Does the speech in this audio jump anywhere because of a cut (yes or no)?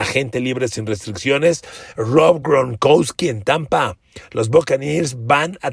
no